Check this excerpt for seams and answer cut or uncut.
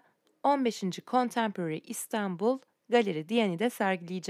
uncut